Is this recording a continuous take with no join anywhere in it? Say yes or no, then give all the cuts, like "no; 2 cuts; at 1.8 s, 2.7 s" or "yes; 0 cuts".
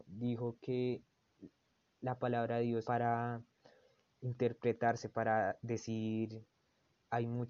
no; 1 cut; at 2.8 s